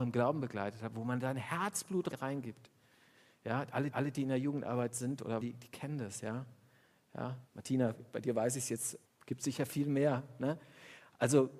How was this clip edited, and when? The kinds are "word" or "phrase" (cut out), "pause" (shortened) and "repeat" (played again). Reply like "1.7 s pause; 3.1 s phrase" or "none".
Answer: 2.1 s word; 3.9 s repeat; 5.4 s word; 7.5 s pause; 9.0 s pause